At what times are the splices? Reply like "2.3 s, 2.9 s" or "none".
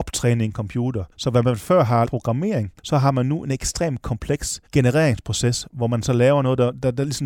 1.1 s, 2.0 s, 2.8 s, 4.7 s